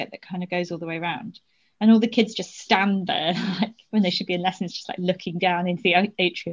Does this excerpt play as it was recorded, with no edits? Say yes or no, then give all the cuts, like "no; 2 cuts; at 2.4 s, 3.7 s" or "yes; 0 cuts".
yes; 0 cuts